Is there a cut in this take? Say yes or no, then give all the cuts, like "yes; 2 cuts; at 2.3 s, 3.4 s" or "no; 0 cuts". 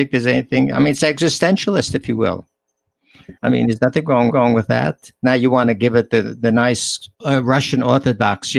yes; 3 cuts; at 3.4 s, 4.3 s, 7.1 s